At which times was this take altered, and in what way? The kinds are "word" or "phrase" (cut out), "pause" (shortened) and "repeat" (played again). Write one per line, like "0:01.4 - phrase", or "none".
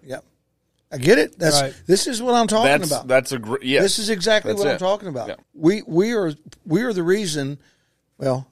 0:05.4 - pause